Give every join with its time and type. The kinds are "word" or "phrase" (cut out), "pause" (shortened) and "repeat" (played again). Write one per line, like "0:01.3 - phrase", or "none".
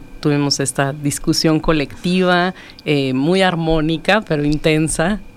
none